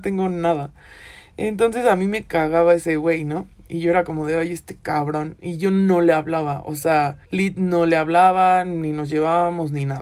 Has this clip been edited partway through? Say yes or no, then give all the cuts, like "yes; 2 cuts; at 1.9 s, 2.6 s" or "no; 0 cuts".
yes; 1 cut; at 7.2 s